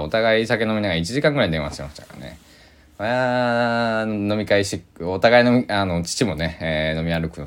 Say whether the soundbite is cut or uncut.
uncut